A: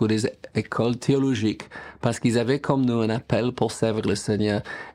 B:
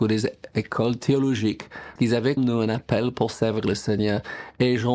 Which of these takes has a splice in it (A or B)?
B